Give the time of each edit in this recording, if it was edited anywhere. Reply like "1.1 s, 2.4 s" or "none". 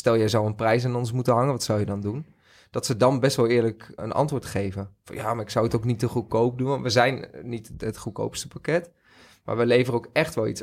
4.0 s